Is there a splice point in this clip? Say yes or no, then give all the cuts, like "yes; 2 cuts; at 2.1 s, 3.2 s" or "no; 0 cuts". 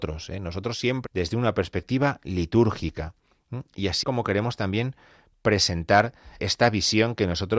yes; 3 cuts; at 1.0 s, 4.0 s, 6.4 s